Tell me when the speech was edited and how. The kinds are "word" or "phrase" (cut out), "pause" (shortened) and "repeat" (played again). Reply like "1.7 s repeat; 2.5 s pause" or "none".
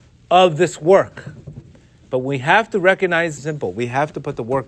3.4 s word